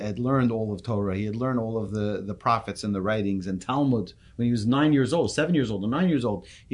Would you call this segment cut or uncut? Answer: uncut